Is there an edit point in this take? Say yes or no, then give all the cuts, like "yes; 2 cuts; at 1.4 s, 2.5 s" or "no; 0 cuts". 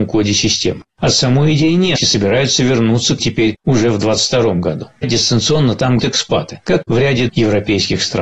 yes; 6 cuts; at 2.0 s, 3.2 s, 5.0 s, 6.0 s, 6.8 s, 7.3 s